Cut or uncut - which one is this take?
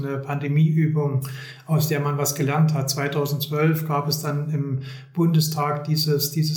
uncut